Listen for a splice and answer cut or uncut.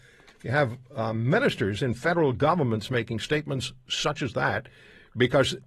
uncut